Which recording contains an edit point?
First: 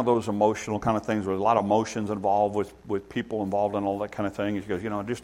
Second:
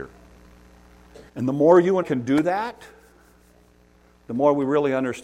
second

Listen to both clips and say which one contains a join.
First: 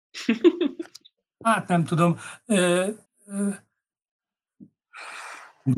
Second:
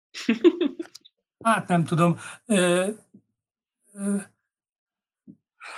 first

